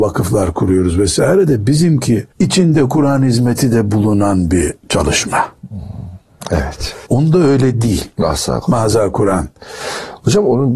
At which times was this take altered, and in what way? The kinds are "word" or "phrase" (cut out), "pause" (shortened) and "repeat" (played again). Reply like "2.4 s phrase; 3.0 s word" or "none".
2.3 s pause; 4.8 s pause; 7.1 s pause

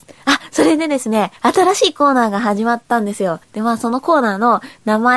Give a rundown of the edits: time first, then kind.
1.4 s pause; 3.4 s pause

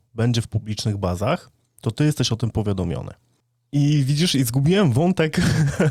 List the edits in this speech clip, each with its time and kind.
none

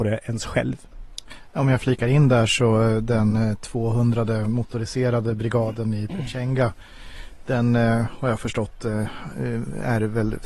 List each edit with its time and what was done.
none

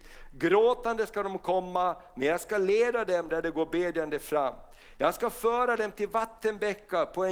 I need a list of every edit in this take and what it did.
none

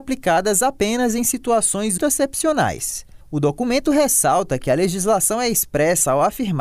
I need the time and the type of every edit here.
2.0 s word

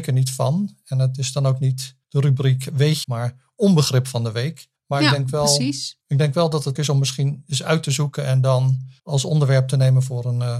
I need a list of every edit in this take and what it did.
2.0 s pause; 3.0 s phrase; 4.8 s pause; 6.0 s pause; 6.8 s word; 9.0 s pause

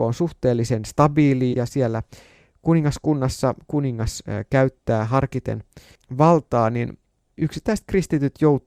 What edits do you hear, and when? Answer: 1.5 s word

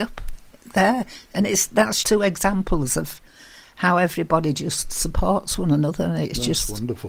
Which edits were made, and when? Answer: 1.3 s pause; 2.0 s word

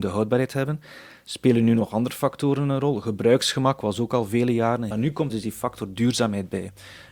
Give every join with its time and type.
4.9 s phrase; 5.3 s word

